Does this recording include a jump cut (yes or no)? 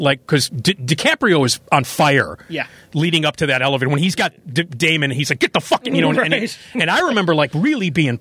no